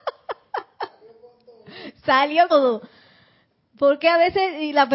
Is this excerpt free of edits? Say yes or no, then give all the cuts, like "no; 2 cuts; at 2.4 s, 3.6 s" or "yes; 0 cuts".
no; 1 cut; at 2.5 s